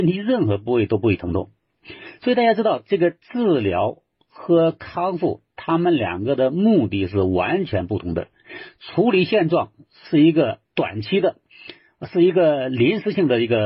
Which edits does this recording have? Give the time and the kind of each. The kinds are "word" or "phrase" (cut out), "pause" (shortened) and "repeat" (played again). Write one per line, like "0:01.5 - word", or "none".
0:03.2 - pause
0:10.7 - pause